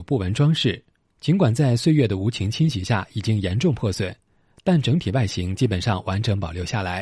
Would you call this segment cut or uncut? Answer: uncut